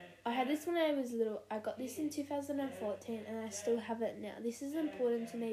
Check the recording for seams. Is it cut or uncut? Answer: uncut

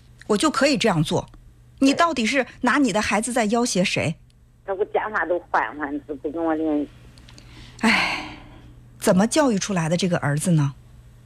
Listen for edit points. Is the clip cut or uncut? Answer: uncut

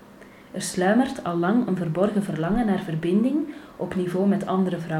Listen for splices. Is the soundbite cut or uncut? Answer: uncut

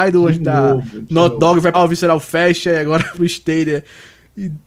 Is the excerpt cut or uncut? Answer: cut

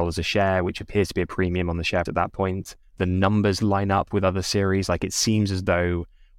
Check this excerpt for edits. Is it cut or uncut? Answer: cut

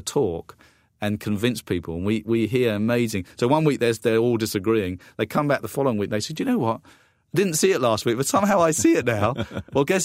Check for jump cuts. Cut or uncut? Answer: uncut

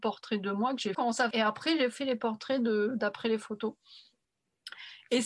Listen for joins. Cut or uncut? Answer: cut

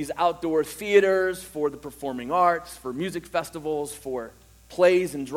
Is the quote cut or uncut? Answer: uncut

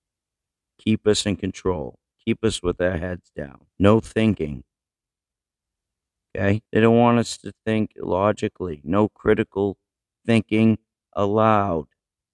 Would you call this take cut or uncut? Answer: cut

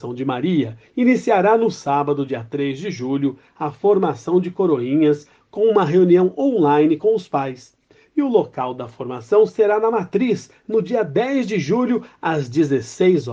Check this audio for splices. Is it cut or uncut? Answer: uncut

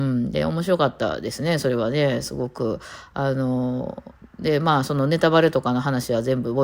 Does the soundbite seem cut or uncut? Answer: uncut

